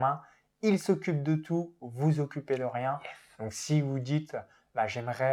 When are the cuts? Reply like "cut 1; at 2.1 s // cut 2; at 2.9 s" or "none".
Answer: none